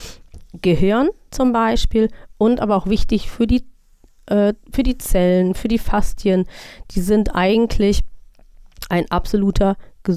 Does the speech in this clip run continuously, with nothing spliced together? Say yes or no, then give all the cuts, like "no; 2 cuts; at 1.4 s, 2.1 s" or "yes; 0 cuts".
yes; 0 cuts